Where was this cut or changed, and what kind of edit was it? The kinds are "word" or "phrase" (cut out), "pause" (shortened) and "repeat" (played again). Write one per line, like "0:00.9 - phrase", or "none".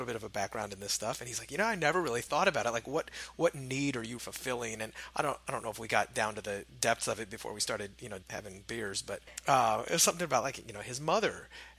0:04.2 - word
0:08.2 - pause
0:09.3 - pause